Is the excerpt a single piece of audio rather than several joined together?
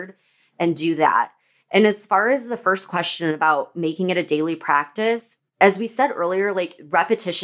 no; 1 cut; at 5.4 s

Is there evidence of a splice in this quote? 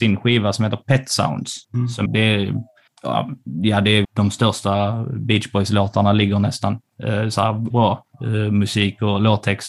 yes; 5 cuts; at 1.6 s, 2.1 s, 2.9 s, 4.0 s, 7.7 s

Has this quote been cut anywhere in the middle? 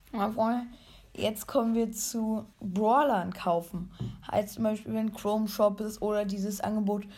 yes; 1 cut; at 2.5 s

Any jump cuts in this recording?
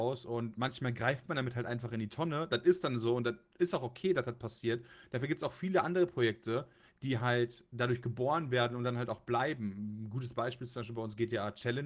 no; 0 cuts

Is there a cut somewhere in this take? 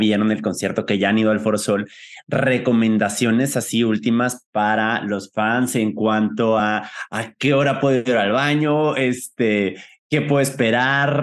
no; 0 cuts

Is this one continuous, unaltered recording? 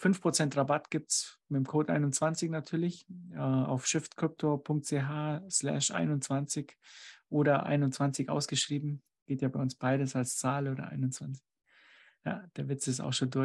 yes; 0 cuts

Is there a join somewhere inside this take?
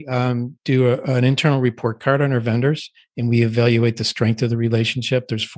no; 0 cuts

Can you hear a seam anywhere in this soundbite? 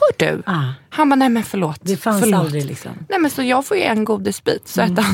no; 0 cuts

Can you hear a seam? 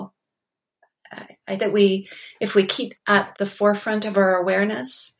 yes; 3 cuts; at 1.6 s, 2.9 s, 3.3 s

